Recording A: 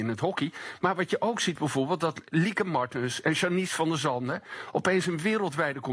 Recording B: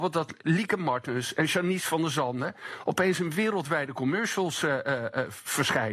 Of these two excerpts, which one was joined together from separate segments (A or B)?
A